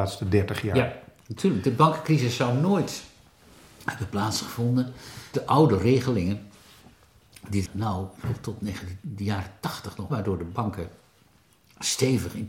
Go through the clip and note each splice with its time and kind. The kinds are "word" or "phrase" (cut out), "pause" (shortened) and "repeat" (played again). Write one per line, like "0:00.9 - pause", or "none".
0:05.3 - word
0:07.7 - word
0:10.1 - word